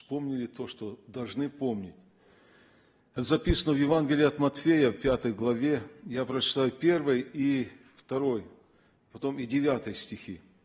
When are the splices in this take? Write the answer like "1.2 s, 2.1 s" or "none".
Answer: none